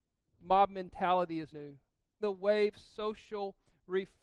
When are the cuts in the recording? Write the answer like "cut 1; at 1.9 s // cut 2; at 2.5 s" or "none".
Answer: cut 1; at 1.5 s // cut 2; at 2.2 s // cut 3; at 2.7 s